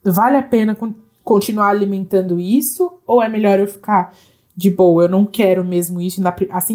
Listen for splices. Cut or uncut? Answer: uncut